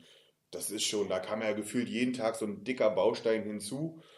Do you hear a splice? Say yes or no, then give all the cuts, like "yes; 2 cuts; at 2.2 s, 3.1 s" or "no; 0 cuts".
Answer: no; 0 cuts